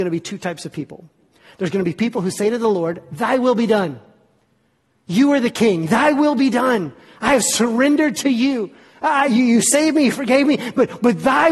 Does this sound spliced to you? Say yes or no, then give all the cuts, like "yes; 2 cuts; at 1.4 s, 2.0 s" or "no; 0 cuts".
no; 0 cuts